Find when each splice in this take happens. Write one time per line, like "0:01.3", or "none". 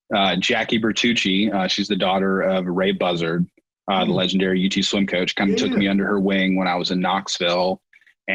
none